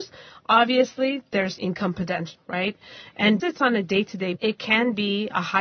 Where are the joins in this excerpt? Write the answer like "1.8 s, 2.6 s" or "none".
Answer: 1.6 s, 2.4 s, 3.4 s, 4.4 s